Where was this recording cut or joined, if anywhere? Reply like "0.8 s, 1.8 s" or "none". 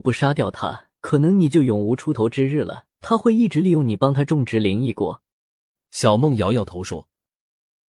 1.0 s, 2.9 s, 5.3 s